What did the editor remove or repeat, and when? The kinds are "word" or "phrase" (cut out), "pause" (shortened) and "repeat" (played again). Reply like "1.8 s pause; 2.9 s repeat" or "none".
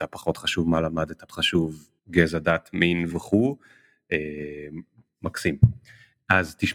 1.3 s word; 2.0 s pause; 3.1 s word